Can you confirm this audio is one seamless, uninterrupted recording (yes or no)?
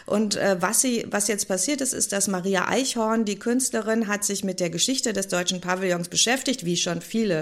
yes